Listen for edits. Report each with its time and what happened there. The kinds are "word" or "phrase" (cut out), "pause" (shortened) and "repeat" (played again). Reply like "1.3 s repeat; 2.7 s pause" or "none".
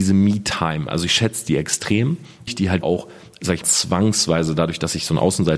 2.5 s word; 2.8 s word; 3.6 s word